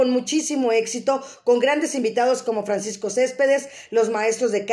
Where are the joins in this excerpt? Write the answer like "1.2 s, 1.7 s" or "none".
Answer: none